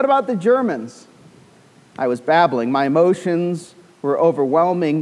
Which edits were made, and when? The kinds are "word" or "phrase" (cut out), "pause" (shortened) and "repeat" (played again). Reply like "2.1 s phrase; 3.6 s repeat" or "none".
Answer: none